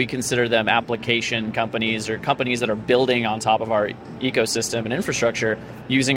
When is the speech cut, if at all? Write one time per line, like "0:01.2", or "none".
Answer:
none